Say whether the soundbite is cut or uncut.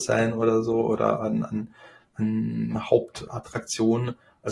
uncut